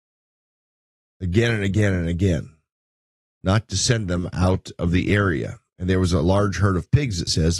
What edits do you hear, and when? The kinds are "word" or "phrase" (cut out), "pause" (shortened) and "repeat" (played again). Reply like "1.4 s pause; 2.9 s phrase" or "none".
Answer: none